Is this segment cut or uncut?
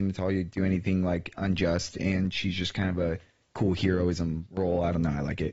uncut